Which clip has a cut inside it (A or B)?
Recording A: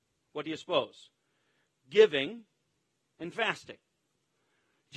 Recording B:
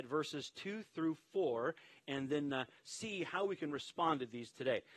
A